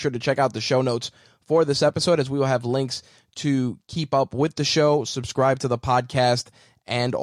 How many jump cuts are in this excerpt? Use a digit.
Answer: 0